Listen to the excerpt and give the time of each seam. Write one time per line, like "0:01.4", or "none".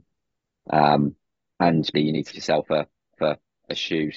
0:01.9
0:02.3
0:03.2